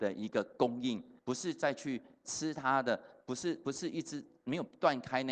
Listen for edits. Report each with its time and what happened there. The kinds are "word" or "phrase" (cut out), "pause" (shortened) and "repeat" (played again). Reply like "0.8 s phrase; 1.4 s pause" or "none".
1.2 s pause